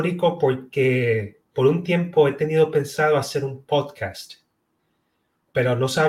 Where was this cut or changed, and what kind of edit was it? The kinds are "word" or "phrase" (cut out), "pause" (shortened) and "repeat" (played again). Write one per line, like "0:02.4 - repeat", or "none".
0:01.5 - pause